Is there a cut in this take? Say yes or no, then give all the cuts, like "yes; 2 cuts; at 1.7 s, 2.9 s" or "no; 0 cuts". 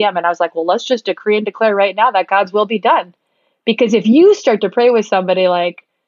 no; 0 cuts